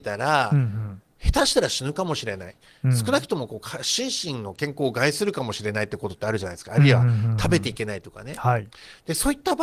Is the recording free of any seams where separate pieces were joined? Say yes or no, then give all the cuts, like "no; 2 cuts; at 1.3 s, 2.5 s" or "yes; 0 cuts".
yes; 0 cuts